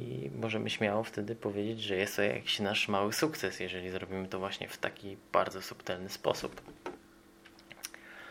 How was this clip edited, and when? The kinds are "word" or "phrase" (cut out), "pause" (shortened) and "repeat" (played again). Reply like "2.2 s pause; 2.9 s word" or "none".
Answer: 5.3 s pause